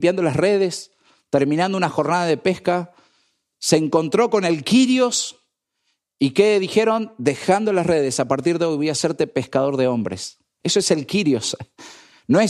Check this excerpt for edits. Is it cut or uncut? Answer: uncut